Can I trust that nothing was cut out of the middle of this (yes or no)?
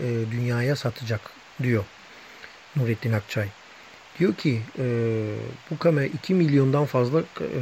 yes